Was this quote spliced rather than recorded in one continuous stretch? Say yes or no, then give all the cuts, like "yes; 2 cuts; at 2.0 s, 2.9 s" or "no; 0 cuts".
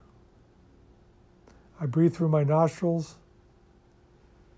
no; 0 cuts